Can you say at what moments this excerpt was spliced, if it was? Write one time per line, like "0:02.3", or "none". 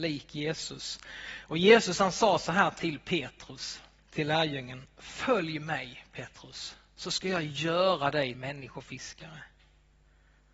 0:04.0
0:08.3